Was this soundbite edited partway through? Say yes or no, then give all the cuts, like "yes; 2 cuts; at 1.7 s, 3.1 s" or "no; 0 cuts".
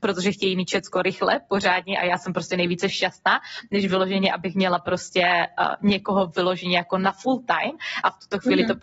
no; 0 cuts